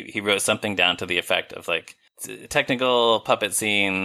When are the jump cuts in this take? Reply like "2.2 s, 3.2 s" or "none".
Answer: 2.1 s